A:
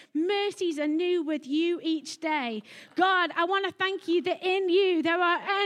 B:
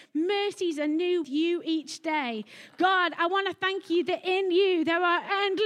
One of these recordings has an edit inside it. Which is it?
B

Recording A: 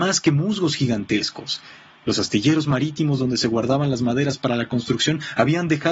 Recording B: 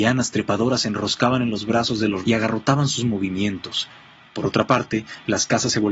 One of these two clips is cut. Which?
B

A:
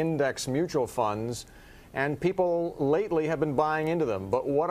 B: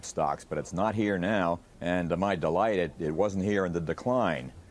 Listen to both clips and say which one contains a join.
B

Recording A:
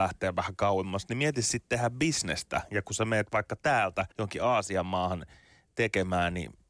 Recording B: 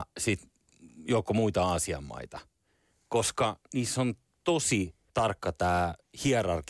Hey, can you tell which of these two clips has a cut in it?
A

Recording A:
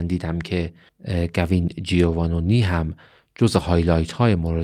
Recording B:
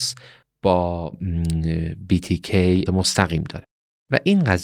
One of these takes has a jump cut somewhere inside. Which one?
B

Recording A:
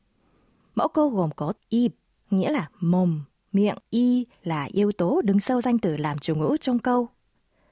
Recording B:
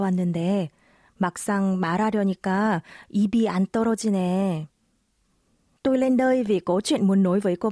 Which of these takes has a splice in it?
A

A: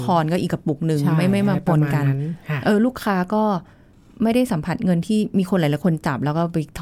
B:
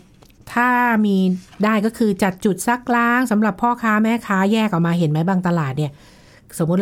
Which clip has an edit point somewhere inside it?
B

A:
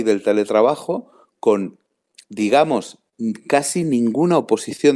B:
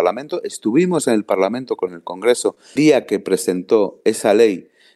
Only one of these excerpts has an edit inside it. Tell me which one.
B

